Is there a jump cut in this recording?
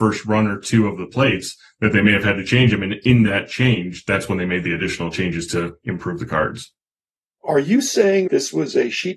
no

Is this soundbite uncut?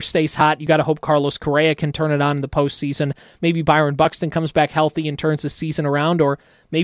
yes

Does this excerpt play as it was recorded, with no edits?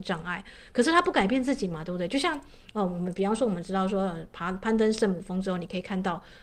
yes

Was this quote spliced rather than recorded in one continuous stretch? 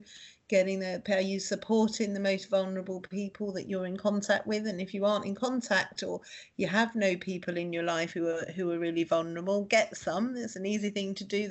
no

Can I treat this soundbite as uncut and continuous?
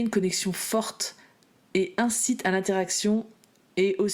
yes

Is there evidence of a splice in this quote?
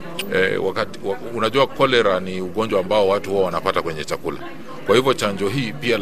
no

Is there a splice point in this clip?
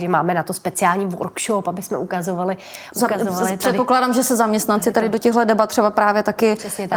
no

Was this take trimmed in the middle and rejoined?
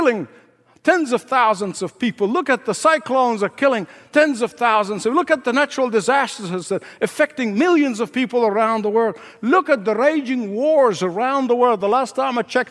no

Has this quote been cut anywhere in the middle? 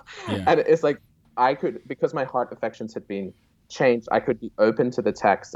no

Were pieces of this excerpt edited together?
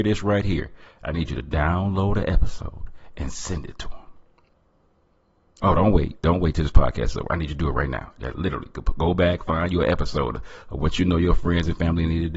no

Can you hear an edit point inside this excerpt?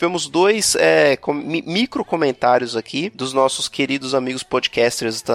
no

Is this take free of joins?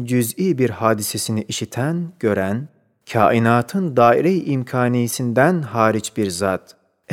yes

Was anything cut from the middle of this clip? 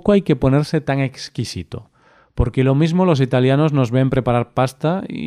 no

